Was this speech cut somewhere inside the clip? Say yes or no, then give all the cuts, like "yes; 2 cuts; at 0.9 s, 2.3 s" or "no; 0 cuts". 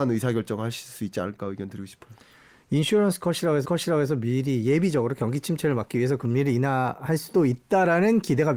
yes; 1 cut; at 3.6 s